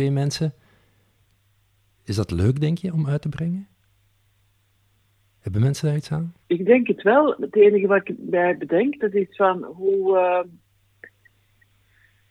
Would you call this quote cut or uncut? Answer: cut